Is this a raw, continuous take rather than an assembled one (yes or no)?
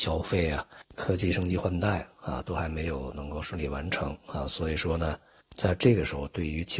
yes